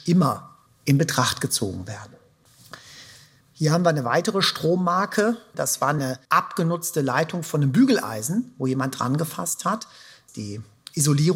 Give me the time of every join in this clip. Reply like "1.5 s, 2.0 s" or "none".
none